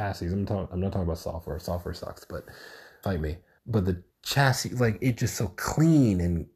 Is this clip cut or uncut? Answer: cut